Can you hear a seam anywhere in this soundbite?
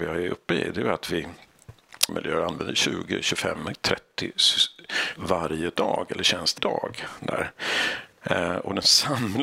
yes; 3 cuts; at 2.1 s, 5.2 s, 6.6 s

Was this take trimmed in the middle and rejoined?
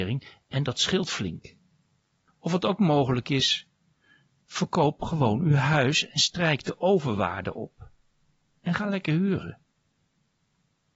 no; 0 cuts

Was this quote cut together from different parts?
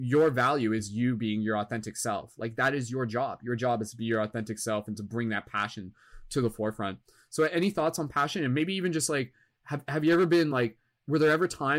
no; 0 cuts

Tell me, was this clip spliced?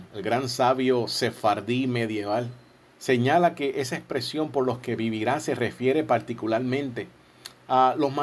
no; 0 cuts

